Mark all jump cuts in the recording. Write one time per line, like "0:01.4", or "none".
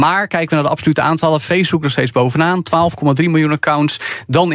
none